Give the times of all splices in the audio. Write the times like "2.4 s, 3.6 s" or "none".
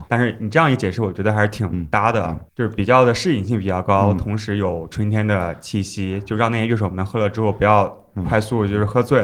2.5 s